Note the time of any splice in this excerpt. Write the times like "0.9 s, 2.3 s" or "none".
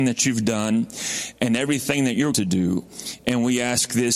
2.3 s